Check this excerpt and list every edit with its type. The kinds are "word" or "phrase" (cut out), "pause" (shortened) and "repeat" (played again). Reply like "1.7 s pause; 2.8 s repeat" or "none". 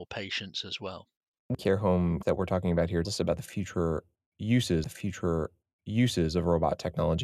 1.5 s phrase; 2.2 s word; 3.0 s word; 4.8 s repeat